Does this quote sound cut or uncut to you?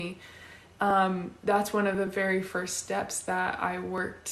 uncut